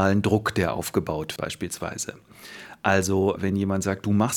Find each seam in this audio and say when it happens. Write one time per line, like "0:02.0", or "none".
0:01.4
0:03.4